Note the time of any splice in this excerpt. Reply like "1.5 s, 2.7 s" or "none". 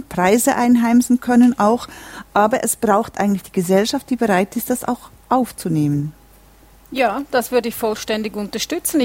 none